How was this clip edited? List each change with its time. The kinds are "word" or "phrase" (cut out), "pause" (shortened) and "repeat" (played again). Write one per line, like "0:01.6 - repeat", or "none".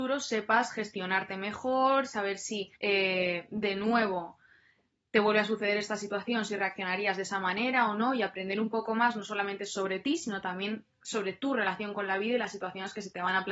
0:02.8 - pause